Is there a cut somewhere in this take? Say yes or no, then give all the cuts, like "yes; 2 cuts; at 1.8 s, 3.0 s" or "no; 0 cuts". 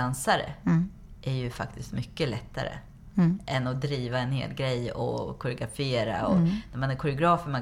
no; 0 cuts